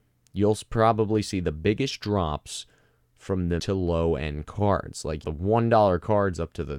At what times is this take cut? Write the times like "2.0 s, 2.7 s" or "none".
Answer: 3.6 s, 5.2 s